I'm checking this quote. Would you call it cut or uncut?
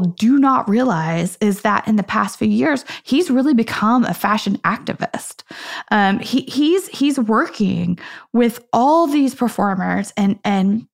uncut